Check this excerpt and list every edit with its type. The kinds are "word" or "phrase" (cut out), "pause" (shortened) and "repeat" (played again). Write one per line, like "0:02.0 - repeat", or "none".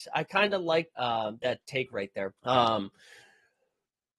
0:00.9 - word
0:02.4 - pause